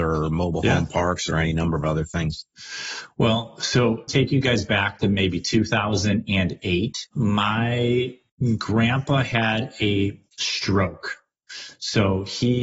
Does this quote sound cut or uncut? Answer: cut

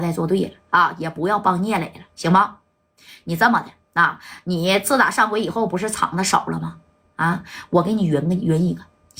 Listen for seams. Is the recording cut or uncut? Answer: uncut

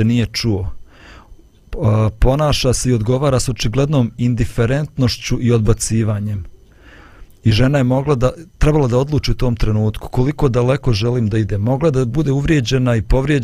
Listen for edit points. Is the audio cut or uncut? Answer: cut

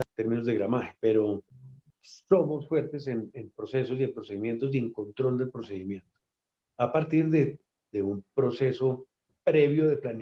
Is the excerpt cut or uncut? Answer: uncut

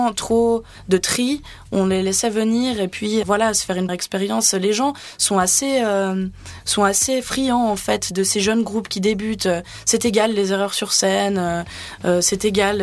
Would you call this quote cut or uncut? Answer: cut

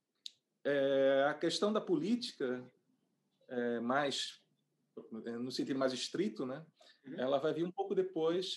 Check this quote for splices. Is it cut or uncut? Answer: uncut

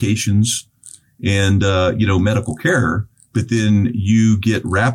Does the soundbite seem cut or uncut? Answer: uncut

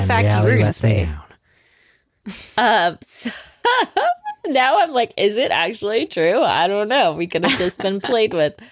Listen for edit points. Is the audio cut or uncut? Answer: uncut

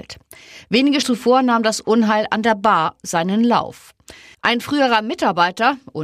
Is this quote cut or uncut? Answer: cut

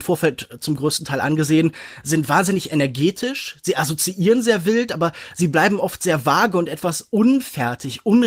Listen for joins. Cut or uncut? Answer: uncut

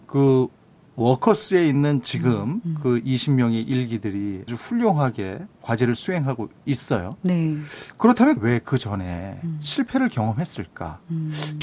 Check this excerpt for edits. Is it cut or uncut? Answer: cut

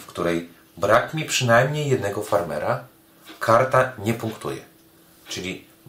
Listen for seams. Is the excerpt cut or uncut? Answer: uncut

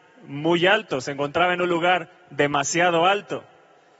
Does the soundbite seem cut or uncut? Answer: uncut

